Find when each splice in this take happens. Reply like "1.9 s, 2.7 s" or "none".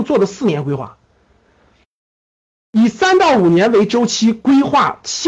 none